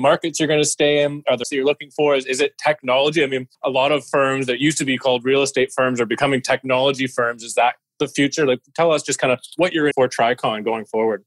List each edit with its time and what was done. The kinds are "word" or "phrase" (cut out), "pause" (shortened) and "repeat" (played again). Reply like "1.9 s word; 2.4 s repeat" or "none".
1.4 s phrase; 3.5 s pause; 9.9 s word